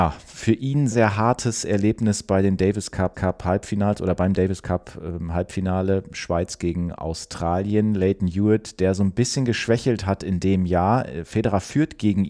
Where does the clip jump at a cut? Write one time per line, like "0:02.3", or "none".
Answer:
0:00.9
0:03.1